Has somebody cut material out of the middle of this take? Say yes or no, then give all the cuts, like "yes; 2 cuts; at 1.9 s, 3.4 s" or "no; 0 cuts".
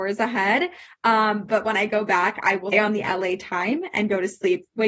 yes; 1 cut; at 2.7 s